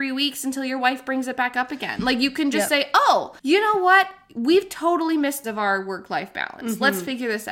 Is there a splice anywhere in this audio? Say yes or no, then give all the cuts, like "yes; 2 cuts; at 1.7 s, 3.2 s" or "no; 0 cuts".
yes; 2 cuts; at 3.4 s, 5.4 s